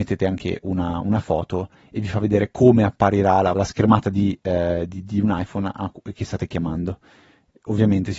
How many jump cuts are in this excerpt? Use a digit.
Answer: 1